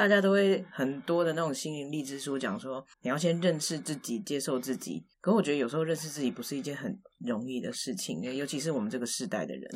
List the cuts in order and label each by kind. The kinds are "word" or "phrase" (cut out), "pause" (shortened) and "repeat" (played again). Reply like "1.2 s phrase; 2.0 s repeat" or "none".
2.9 s pause; 5.1 s pause

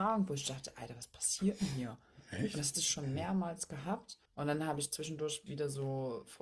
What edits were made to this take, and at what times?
4.3 s pause; 5.5 s word

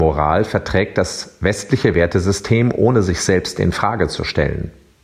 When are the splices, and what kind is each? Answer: none

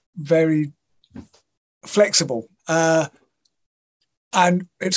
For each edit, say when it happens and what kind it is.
2.6 s pause

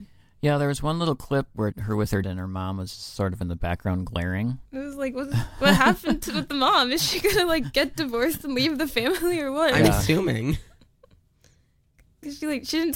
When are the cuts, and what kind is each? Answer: 1.7 s phrase; 2.2 s word; 4.6 s pause

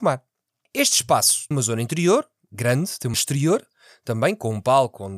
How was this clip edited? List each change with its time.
1.5 s word; 3.1 s word

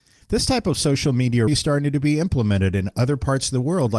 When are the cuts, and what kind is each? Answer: 1.5 s phrase

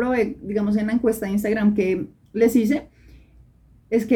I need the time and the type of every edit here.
none

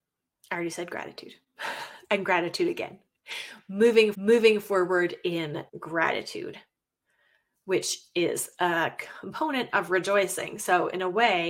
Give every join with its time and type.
2.0 s pause; 4.1 s repeat; 5.7 s pause

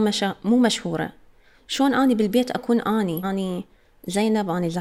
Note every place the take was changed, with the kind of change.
3.2 s word

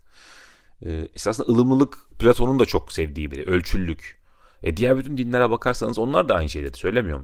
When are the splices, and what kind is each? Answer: 3.3 s phrase

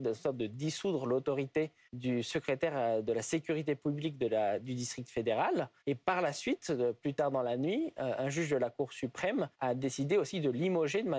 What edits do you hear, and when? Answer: 1.9 s pause; 5.8 s pause; 9.5 s pause

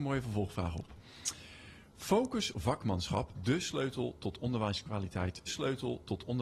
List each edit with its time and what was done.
2.5 s word; 3.3 s word; 5.5 s repeat

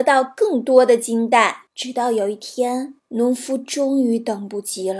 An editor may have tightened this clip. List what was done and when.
1.7 s pause; 3.0 s pause

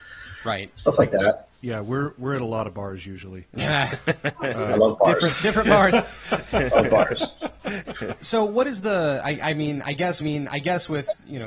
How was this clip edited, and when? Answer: 1.5 s pause; 10.2 s repeat

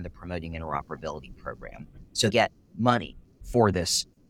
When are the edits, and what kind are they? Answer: 2.3 s word

